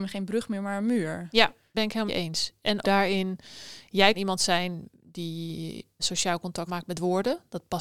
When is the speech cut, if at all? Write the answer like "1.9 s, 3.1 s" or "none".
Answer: 1.7 s, 2.1 s, 2.8 s, 4.1 s, 6.0 s, 6.7 s